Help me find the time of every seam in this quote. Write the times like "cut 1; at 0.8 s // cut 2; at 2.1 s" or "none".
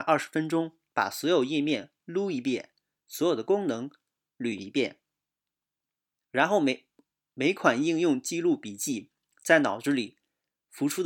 none